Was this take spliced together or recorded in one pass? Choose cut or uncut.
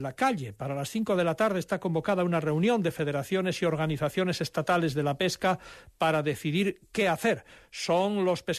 uncut